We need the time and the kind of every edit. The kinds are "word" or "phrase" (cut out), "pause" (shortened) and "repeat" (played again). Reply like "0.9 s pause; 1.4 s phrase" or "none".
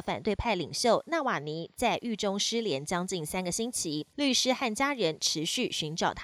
4.1 s pause